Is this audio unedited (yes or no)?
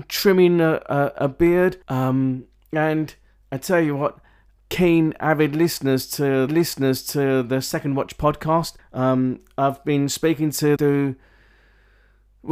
no